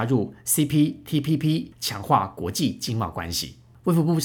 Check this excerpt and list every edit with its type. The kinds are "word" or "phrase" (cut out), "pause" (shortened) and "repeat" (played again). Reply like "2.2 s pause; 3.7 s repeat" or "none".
1.7 s pause